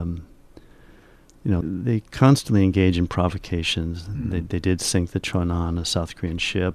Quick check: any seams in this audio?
yes; 1 cut; at 1.6 s

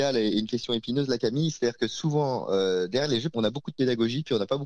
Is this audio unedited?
no; 1 cut; at 3.3 s

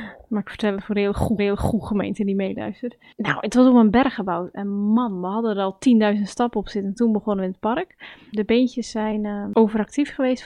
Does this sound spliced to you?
yes; 1 cut; at 1.4 s

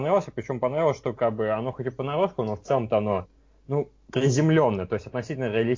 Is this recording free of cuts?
yes; 0 cuts

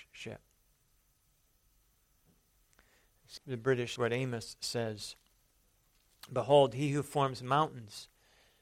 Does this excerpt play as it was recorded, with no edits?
no; 2 cuts; at 3.4 s, 4.0 s

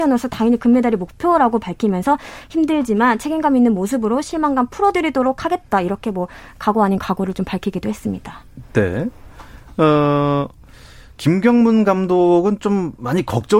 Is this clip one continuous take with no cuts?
yes; 0 cuts

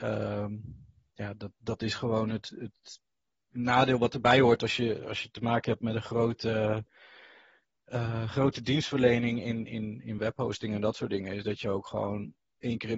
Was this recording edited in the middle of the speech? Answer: no; 0 cuts

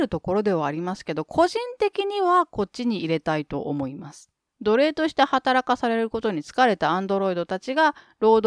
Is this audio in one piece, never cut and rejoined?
yes; 0 cuts

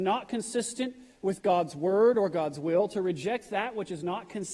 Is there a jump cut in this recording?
no; 0 cuts

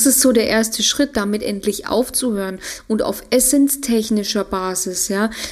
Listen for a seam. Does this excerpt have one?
no; 0 cuts

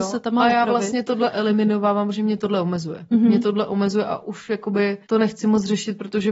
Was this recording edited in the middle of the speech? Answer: yes; 1 cut; at 5.0 s

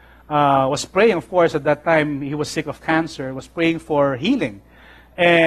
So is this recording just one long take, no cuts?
yes; 0 cuts

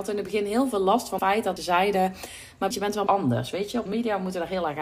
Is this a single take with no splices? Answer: no; 5 cuts; at 1.2 s, 1.6 s, 2.7 s, 3.1 s, 3.9 s

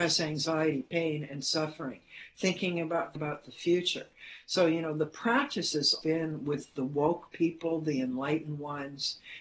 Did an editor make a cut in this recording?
yes; 2 cuts; at 3.1 s, 6.0 s

